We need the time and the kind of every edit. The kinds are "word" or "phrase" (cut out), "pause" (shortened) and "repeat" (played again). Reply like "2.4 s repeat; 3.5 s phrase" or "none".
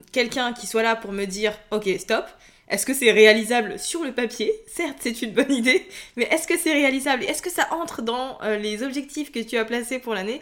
none